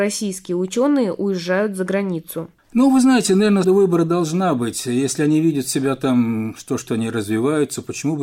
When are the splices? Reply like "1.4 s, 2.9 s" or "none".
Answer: 3.6 s